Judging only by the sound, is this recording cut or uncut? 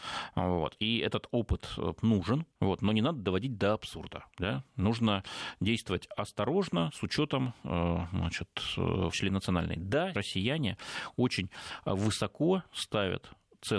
cut